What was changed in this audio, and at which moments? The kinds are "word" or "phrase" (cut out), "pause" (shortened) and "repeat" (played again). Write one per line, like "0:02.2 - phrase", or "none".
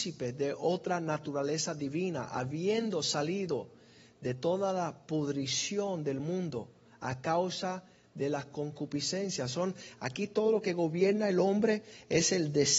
none